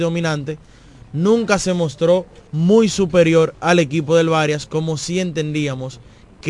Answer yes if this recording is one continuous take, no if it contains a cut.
no